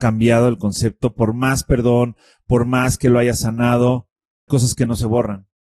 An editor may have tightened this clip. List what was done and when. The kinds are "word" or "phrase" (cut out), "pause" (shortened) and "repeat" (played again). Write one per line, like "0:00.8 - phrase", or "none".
0:04.5 - word

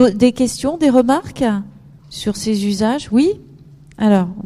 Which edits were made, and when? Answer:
0:02.0 - pause

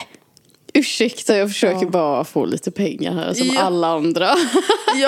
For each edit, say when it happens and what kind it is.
none

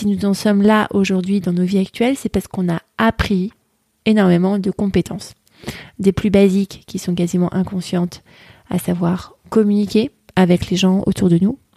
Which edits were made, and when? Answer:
none

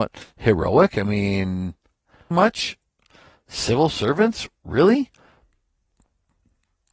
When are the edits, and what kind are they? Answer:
0:02.3 - word

